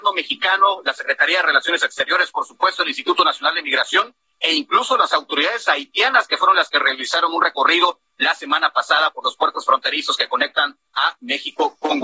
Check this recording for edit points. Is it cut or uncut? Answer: uncut